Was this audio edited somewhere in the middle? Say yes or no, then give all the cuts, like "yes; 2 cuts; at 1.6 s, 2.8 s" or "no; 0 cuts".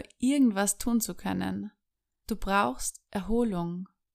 no; 0 cuts